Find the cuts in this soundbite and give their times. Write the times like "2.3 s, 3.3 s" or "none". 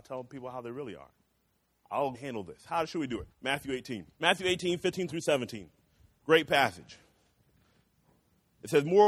2.1 s, 3.3 s, 4.1 s

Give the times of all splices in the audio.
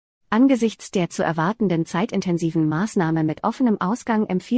none

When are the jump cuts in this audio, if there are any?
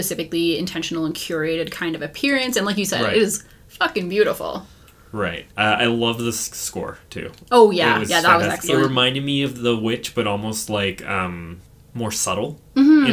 5.5 s

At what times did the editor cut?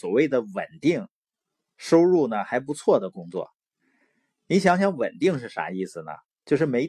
none

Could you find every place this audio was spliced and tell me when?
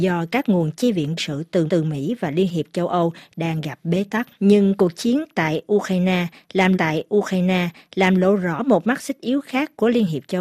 1.2 s, 1.7 s, 4.3 s, 6.7 s

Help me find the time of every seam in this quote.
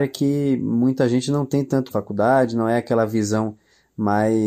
1.9 s

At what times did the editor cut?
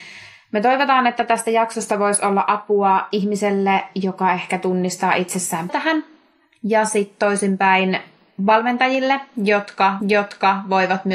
5.7 s, 10.0 s

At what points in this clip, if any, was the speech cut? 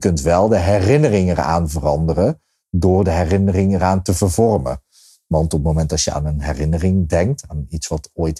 none

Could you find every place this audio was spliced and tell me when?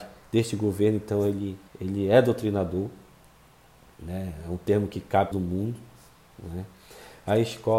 1.7 s, 5.3 s

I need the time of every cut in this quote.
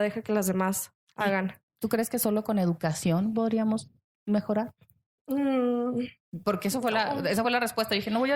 none

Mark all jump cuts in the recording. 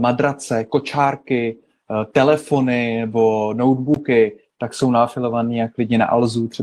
none

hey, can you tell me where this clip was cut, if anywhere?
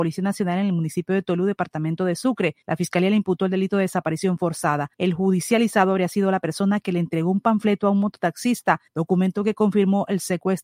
2.6 s, 4.9 s, 8.9 s

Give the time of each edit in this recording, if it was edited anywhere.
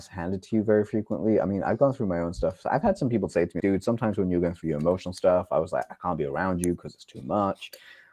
3.6 s

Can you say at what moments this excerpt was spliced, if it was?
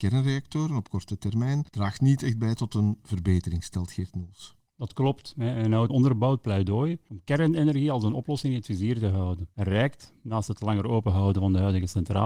5.9 s, 9.5 s

